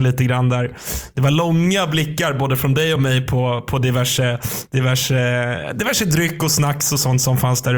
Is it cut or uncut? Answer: uncut